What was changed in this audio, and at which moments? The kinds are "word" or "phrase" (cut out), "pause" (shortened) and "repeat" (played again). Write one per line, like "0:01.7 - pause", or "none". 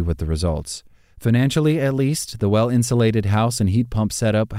none